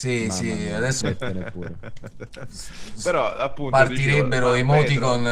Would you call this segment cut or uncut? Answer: cut